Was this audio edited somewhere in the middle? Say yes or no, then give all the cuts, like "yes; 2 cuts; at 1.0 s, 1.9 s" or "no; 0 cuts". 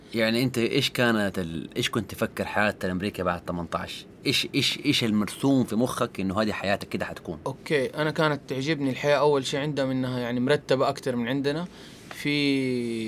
no; 0 cuts